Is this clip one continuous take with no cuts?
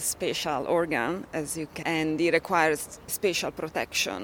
no; 1 cut; at 1.8 s

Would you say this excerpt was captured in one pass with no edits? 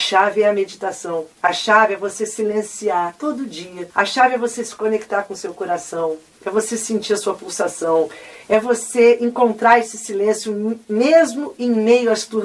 no; 3 cuts; at 1.3 s, 3.9 s, 8.4 s

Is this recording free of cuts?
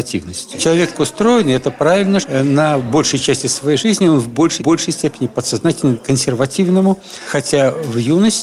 no; 4 cuts; at 0.9 s, 2.2 s, 4.6 s, 6.0 s

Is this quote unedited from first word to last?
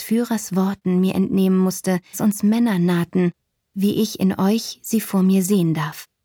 no; 1 cut; at 2.1 s

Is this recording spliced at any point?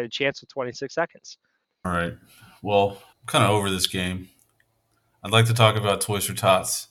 no; 0 cuts

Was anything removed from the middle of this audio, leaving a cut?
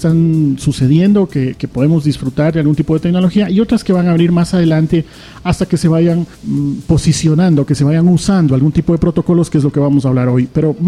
yes; 1 cut; at 6.3 s

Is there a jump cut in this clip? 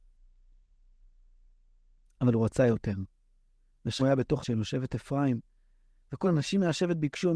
yes; 3 cuts; at 4.0 s, 4.4 s, 6.2 s

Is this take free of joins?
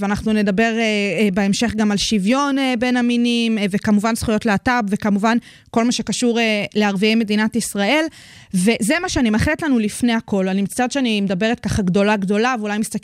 yes; 0 cuts

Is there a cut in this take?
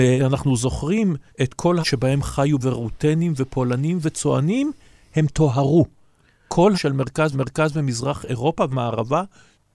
yes; 7 cuts; at 1.3 s, 1.8 s, 2.6 s, 4.0 s, 6.7 s, 7.3 s, 8.7 s

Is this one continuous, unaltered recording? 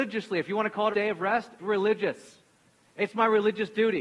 no; 2 cuts; at 0.9 s, 1.6 s

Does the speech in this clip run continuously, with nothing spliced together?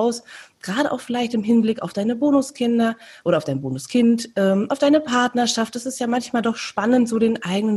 yes; 0 cuts

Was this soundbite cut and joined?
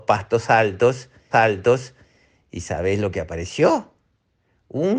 yes; 1 cut; at 1.3 s

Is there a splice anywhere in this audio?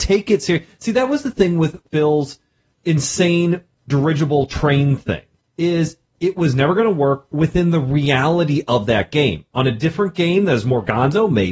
no; 0 cuts

